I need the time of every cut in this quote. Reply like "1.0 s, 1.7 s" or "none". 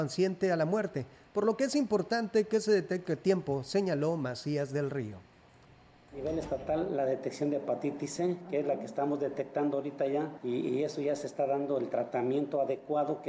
none